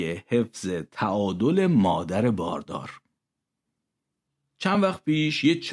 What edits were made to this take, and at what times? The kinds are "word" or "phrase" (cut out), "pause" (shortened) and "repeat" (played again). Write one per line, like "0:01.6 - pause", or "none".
none

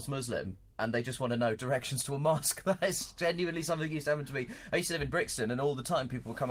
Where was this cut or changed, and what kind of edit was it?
none

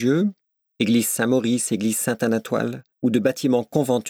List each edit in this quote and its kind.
0:02.9 - pause

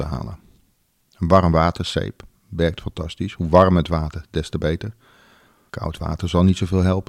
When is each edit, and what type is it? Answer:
none

